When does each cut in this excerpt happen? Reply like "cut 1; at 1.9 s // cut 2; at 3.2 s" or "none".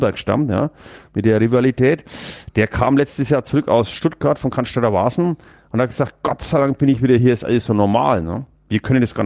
cut 1; at 7.2 s